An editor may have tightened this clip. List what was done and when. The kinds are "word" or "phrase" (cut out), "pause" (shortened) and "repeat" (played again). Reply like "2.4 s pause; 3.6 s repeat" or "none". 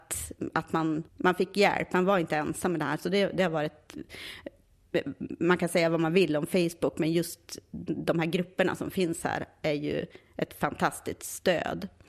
1.1 s pause